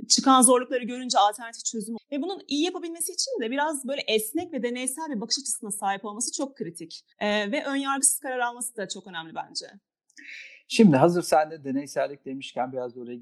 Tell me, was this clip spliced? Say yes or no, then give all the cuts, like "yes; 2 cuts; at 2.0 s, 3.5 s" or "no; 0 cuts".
yes; 2 cuts; at 2.0 s, 7.1 s